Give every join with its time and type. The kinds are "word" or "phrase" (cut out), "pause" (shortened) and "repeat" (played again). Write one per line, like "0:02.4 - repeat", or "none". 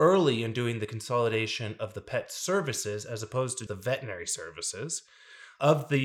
0:03.7 - word